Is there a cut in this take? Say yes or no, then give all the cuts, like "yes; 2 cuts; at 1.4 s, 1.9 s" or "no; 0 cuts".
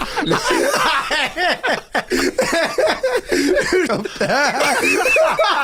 yes; 1 cut; at 3.9 s